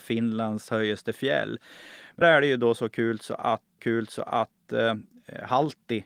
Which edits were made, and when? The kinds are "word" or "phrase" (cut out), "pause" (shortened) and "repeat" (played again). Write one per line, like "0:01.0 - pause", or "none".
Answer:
0:02.2 - word
0:03.8 - repeat